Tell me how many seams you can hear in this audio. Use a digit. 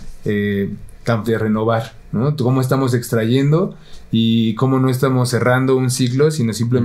1